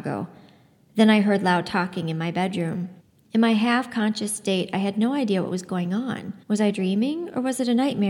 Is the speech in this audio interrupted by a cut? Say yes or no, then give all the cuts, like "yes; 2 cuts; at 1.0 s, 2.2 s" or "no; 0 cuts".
yes; 2 cuts; at 3.0 s, 6.4 s